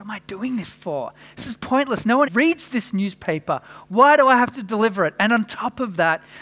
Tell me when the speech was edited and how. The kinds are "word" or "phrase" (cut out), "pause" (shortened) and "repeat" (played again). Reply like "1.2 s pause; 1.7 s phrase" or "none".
2.3 s word

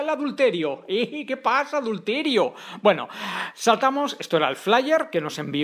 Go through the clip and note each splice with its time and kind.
none

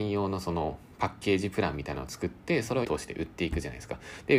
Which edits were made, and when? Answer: 2.8 s word

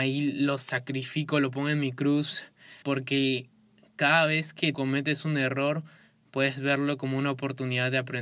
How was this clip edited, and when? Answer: 2.8 s word; 4.7 s word

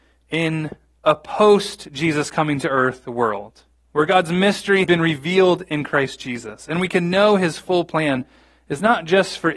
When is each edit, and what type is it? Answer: 4.8 s word

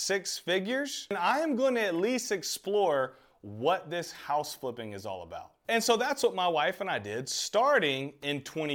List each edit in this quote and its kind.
none

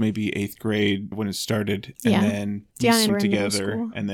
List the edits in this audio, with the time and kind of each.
1.1 s phrase; 2.7 s pause; 3.1 s word

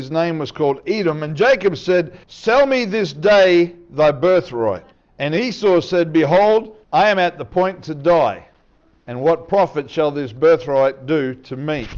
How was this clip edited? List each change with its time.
2.2 s pause; 4.9 s pause; 6.8 s pause

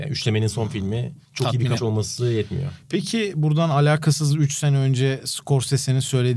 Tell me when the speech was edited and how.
1.2 s pause; 1.8 s word

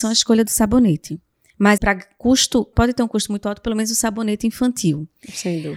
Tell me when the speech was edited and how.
1.8 s word; 2.7 s phrase

